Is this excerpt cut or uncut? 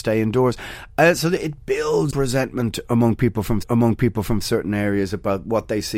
cut